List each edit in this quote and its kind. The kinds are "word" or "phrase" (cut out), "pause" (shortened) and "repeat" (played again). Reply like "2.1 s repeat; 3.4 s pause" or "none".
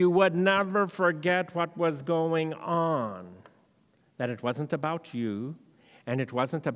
none